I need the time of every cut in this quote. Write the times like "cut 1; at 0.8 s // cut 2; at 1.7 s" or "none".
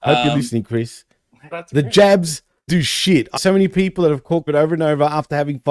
cut 1; at 1.5 s // cut 2; at 2.7 s // cut 3; at 3.4 s // cut 4; at 4.5 s